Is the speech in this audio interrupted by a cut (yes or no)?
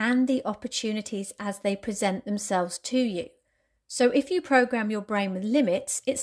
no